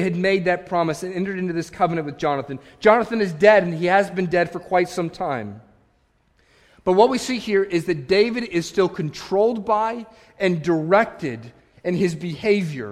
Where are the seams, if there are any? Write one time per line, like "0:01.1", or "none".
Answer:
none